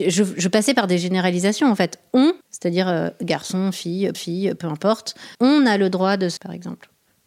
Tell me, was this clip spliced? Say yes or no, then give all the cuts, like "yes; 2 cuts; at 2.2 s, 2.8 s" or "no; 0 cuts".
yes; 4 cuts; at 2.4 s, 4.1 s, 5.3 s, 6.4 s